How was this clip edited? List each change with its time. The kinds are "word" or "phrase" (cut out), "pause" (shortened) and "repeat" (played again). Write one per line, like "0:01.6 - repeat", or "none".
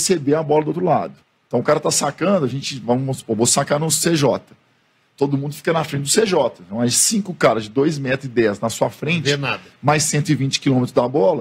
0:01.2 - pause